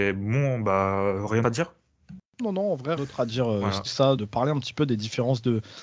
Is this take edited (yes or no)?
yes